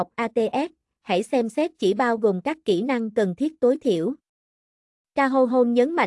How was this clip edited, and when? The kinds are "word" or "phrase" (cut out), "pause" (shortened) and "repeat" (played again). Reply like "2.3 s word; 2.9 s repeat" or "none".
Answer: none